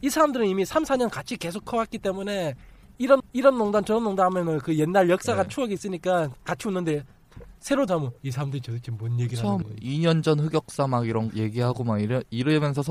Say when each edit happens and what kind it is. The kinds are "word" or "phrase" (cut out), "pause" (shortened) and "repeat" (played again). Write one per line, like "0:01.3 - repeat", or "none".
0:03.2 - repeat
0:07.9 - word
0:08.2 - pause
0:09.6 - word
0:11.3 - word